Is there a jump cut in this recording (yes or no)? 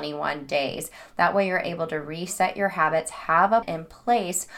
yes